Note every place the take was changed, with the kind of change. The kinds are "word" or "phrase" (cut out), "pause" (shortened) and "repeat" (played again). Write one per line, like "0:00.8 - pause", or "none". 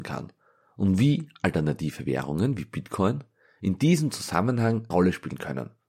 0:04.9 - word